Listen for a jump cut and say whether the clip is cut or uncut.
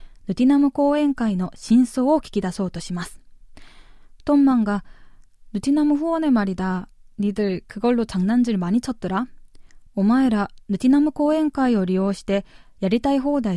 uncut